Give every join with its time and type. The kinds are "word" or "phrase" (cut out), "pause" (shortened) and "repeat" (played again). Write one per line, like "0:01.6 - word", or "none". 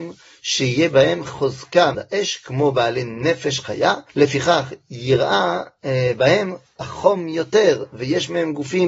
0:01.9 - word
0:04.1 - pause